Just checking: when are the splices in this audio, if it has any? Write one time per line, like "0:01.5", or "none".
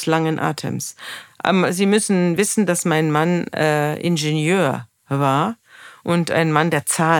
none

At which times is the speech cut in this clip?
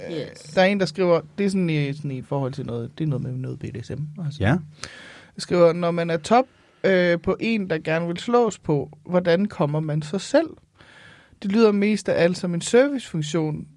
none

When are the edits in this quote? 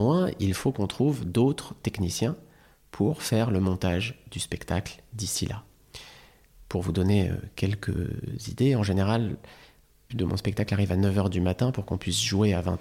0:10.1

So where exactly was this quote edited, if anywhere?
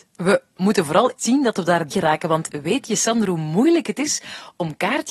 0:01.2
0:01.9

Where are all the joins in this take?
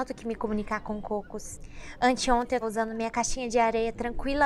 0:02.6

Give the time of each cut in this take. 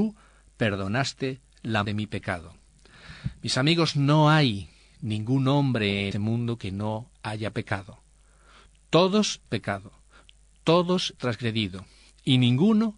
0:01.8
0:06.1
0:09.5
0:11.2

